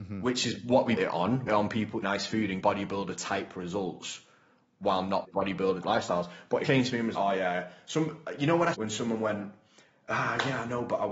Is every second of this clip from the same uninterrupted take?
no; 9 cuts; at 1.0 s, 1.5 s, 2.0 s, 2.6 s, 5.2 s, 5.8 s, 6.6 s, 7.1 s, 8.7 s

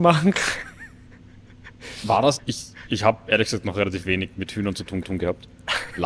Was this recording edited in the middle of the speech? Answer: yes; 2 cuts; at 2.4 s, 5.0 s

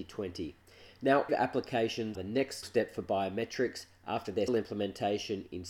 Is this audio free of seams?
no; 4 cuts; at 1.3 s, 2.1 s, 2.6 s, 4.5 s

